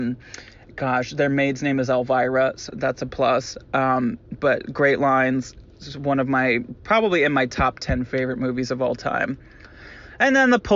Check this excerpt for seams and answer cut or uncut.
cut